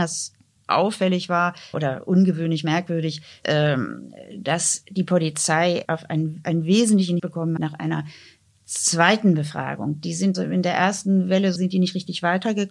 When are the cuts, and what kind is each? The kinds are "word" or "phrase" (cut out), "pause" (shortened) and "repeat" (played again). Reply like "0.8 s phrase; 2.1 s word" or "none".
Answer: 1.7 s word; 3.4 s word; 5.8 s word; 7.2 s word; 7.6 s word; 10.3 s word; 11.6 s word